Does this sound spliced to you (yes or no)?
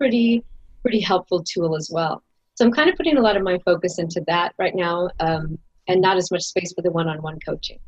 no